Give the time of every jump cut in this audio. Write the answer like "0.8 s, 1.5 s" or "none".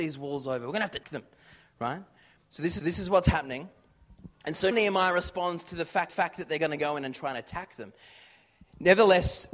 1.0 s, 2.8 s, 4.7 s, 6.1 s